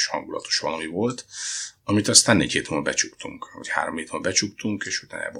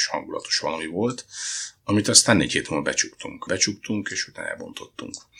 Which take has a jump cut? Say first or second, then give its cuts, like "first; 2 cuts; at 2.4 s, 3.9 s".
second; 1 cut; at 3.5 s